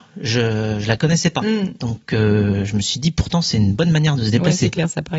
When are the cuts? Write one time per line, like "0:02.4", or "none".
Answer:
none